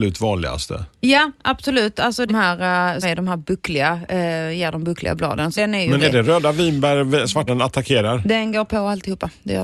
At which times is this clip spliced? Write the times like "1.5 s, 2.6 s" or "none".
2.3 s, 3.0 s, 5.6 s, 6.0 s, 7.5 s